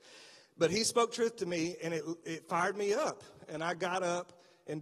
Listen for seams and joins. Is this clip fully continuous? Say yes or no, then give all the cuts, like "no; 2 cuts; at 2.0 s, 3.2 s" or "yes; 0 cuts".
yes; 0 cuts